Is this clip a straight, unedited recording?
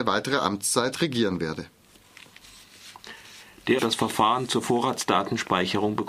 no; 1 cut; at 3.8 s

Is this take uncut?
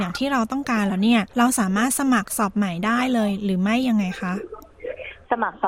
yes; 0 cuts

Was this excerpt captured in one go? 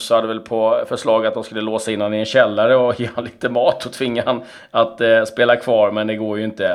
yes; 0 cuts

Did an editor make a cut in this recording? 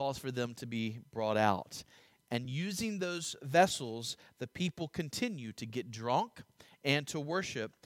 no; 0 cuts

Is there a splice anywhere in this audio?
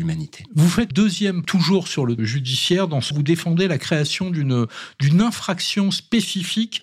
yes; 4 cuts; at 0.9 s, 1.4 s, 2.2 s, 3.1 s

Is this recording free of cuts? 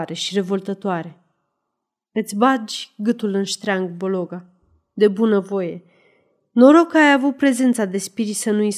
yes; 0 cuts

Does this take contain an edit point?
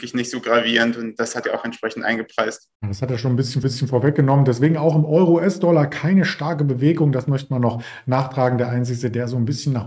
yes; 3 cuts; at 1.4 s, 2.8 s, 3.6 s

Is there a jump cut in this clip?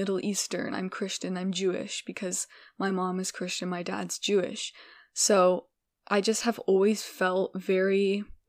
no; 0 cuts

